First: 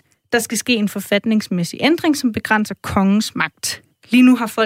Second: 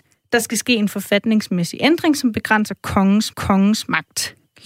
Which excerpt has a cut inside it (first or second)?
second